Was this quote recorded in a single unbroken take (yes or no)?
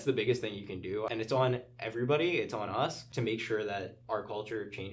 yes